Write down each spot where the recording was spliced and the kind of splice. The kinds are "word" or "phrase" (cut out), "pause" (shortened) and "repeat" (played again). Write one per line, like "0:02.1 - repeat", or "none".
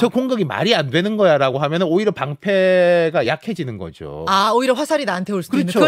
none